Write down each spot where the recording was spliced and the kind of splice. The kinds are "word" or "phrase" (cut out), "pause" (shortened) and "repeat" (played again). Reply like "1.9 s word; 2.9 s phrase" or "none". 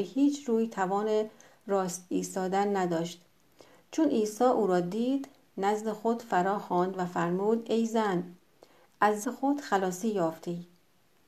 9.2 s word